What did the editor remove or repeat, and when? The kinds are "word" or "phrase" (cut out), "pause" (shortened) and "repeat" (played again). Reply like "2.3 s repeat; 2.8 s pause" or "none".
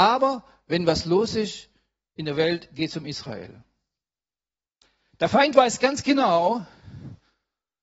none